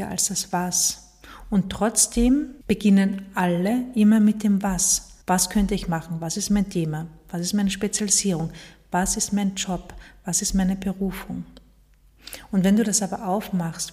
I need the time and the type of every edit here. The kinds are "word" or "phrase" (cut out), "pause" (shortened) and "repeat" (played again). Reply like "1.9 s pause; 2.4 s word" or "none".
2.6 s pause; 5.2 s pause

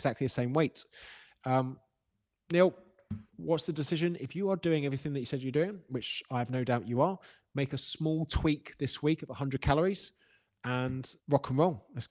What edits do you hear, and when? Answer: 3.3 s pause; 11.2 s pause

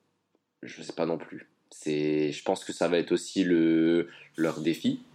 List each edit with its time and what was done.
none

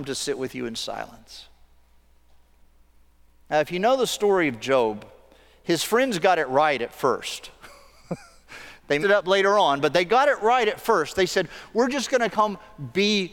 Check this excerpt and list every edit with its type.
9.0 s word

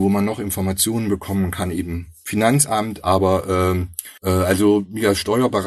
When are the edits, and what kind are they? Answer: 4.2 s pause

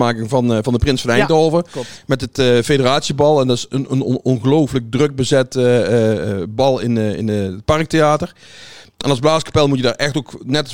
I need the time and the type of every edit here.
none

